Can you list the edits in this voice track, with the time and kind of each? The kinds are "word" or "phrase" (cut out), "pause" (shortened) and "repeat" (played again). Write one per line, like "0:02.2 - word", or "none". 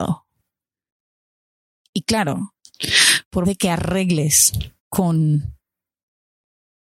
0:03.4 - word
0:04.8 - pause